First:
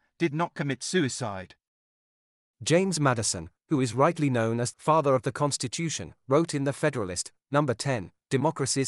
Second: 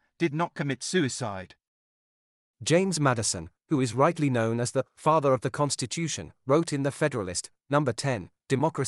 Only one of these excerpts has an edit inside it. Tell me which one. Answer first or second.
first